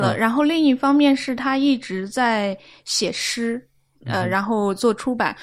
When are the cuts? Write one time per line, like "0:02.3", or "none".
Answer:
none